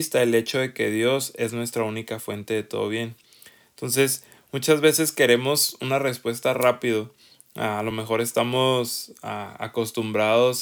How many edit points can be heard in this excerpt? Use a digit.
0